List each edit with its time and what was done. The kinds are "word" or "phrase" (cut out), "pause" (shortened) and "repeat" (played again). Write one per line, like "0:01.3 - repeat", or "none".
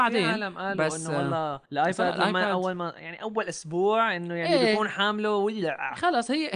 0:01.7 - pause